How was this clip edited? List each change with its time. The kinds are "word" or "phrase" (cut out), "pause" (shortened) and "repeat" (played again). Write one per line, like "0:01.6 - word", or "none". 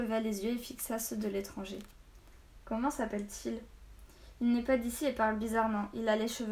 none